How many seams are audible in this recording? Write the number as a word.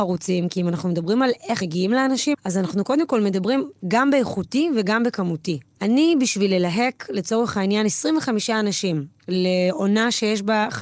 two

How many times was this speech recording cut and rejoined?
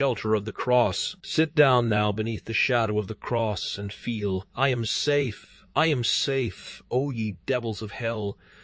two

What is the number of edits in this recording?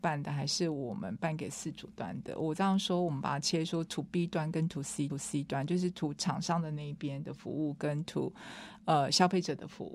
one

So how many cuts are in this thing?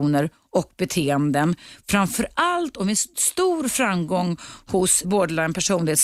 one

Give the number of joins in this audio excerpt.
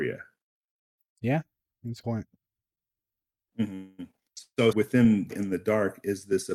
three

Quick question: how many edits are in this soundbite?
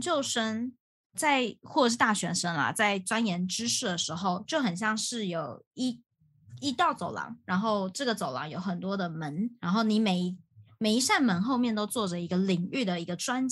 two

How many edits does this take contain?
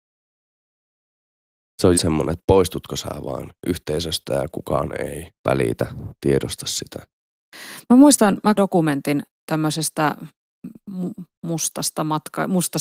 three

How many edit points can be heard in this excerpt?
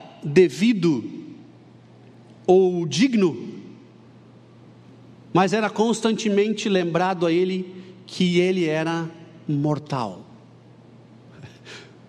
zero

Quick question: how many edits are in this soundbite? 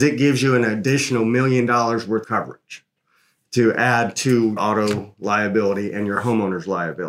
two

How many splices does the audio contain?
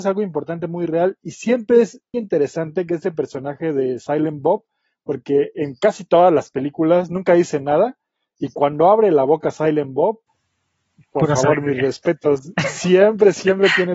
one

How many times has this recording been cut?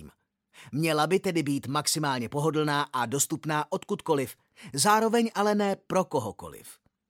zero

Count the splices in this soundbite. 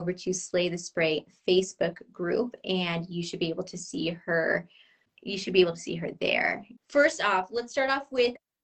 zero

